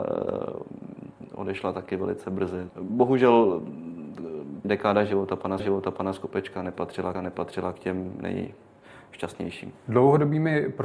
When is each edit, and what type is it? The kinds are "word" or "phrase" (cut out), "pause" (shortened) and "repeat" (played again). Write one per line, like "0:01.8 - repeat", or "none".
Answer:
0:02.7 - word
0:04.6 - word
0:05.6 - repeat
0:07.1 - repeat